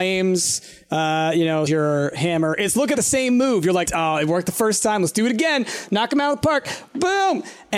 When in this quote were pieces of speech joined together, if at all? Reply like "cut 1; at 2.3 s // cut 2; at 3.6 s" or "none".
cut 1; at 1.7 s // cut 2; at 2.9 s // cut 3; at 3.9 s